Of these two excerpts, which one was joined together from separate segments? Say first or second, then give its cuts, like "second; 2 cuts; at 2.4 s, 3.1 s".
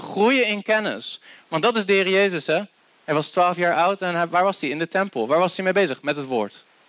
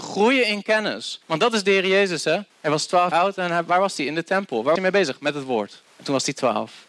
second; 5 cuts; at 1.2 s, 2.5 s, 3.1 s, 4.8 s, 5.9 s